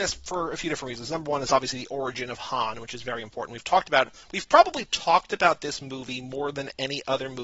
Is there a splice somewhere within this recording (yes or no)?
no